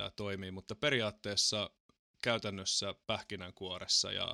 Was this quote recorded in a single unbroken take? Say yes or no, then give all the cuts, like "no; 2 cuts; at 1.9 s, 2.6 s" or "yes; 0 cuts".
yes; 0 cuts